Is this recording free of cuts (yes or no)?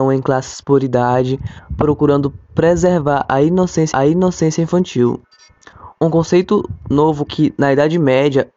no